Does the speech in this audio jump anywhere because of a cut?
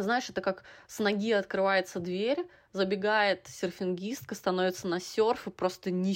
no; 0 cuts

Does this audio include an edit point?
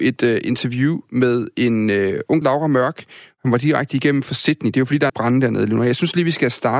yes; 2 cuts; at 2.4 s, 5.1 s

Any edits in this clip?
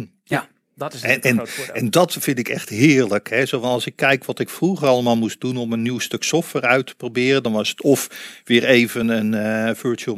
no; 0 cuts

